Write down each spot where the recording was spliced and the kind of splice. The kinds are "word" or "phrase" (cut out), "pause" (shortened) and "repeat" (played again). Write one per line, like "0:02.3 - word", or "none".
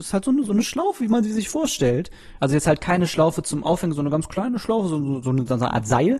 0:02.4 - word